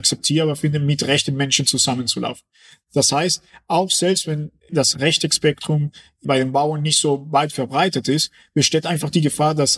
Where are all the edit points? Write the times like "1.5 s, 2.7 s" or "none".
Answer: none